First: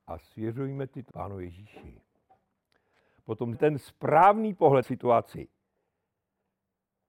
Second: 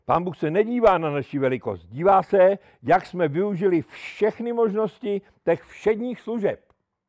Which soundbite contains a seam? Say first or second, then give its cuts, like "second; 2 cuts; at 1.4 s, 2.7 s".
first; 3 cuts; at 1.1 s, 3.5 s, 4.8 s